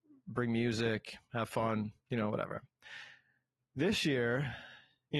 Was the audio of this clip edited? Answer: no; 0 cuts

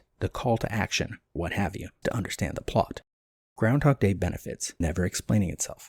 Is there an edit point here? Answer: yes; 3 cuts; at 1.4 s, 2.0 s, 4.8 s

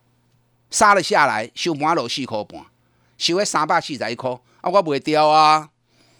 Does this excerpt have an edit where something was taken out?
no; 0 cuts

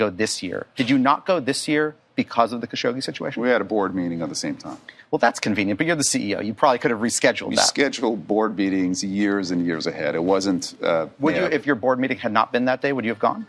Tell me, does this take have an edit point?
no; 0 cuts

